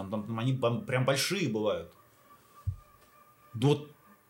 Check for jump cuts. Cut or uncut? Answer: uncut